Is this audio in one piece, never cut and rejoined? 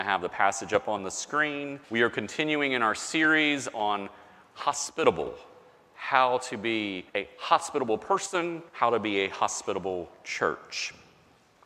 no; 3 cuts; at 1.8 s, 7.1 s, 8.7 s

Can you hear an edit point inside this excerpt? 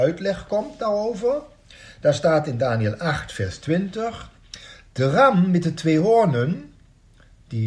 no; 0 cuts

